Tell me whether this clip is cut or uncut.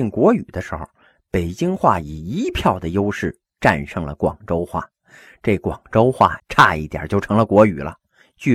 cut